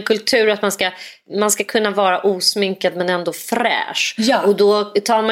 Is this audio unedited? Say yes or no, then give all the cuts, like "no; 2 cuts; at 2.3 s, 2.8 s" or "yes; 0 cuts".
yes; 0 cuts